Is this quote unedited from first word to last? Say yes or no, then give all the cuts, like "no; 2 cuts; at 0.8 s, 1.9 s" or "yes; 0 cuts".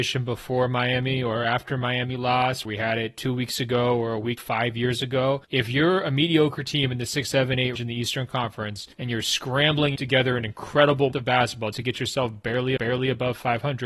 no; 9 cuts; at 2.7 s, 4.4 s, 5.4 s, 7.8 s, 8.9 s, 10.0 s, 11.1 s, 11.7 s, 12.8 s